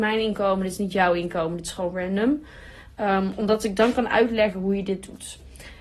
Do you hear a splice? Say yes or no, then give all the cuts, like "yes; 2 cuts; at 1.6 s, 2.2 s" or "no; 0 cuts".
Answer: no; 0 cuts